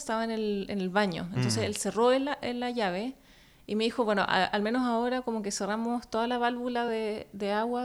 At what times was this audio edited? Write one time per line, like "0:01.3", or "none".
none